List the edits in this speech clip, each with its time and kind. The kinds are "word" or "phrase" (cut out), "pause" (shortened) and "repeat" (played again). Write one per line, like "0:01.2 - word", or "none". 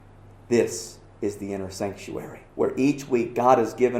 0:02.5 - pause

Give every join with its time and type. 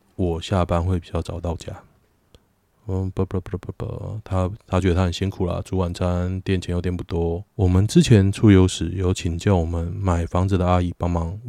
0:07.5 - pause

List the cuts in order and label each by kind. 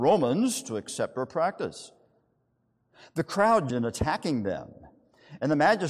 0:03.7 - word

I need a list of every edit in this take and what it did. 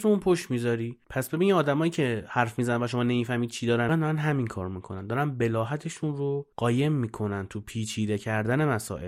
0:03.9 - phrase
0:06.5 - pause

